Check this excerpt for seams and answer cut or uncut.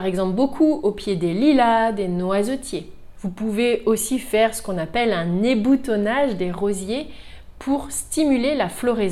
uncut